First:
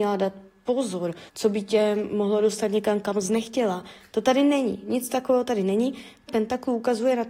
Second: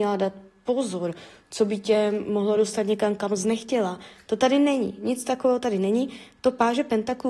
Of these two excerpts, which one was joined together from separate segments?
first; 2 cuts; at 1.3 s, 6.3 s

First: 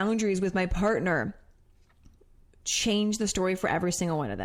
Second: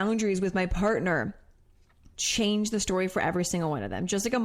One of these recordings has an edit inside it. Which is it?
second; 1 cut; at 2.1 s

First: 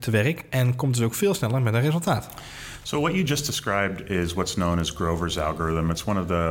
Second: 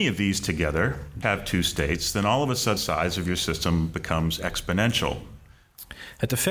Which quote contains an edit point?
second; 2 cuts; at 1.2 s, 2.8 s

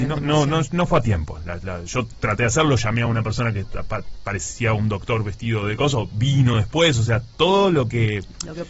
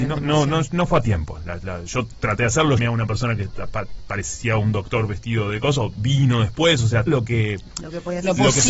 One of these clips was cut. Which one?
second; 2 cuts; at 2.8 s, 7.1 s

